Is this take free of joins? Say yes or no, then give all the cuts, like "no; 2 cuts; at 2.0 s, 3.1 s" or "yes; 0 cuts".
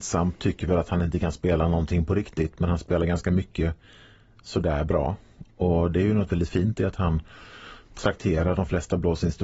yes; 0 cuts